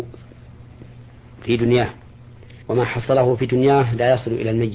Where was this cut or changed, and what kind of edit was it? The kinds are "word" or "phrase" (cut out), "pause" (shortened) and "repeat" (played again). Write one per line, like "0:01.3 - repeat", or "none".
0:02.6 - pause